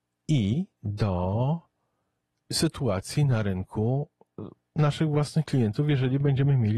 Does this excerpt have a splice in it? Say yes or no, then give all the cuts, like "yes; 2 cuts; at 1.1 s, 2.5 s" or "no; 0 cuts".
no; 0 cuts